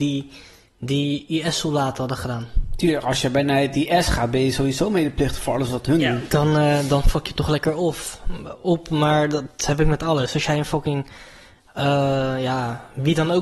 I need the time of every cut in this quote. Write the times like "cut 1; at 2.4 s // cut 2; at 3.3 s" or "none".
none

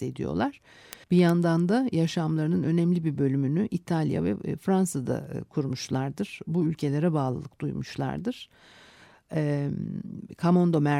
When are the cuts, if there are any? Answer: cut 1; at 1.0 s

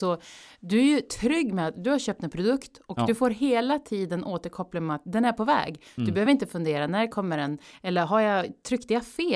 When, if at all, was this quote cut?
none

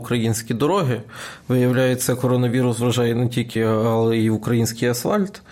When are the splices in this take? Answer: cut 1; at 3.6 s

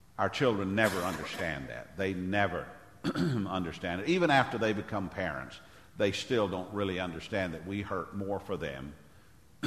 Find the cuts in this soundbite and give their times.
none

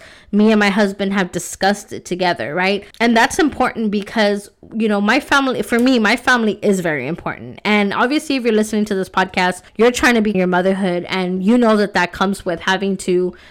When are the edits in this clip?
cut 1; at 2.9 s // cut 2; at 9.7 s // cut 3; at 10.3 s

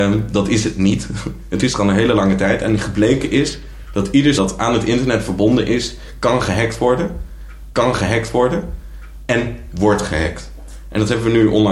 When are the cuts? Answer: cut 1; at 4.4 s // cut 2; at 7.7 s

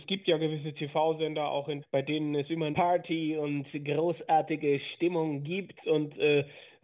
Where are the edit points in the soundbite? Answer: cut 1; at 1.8 s // cut 2; at 2.7 s

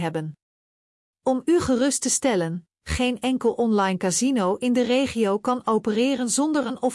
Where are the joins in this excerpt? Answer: none

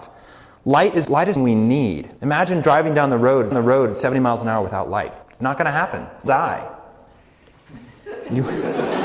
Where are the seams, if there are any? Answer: cut 1; at 1.0 s // cut 2; at 1.4 s // cut 3; at 2.2 s // cut 4; at 3.5 s // cut 5; at 5.2 s // cut 6; at 6.3 s

